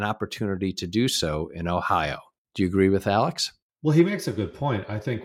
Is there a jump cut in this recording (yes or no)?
no